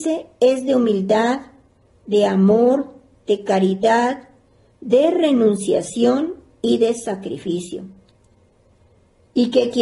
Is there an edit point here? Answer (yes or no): no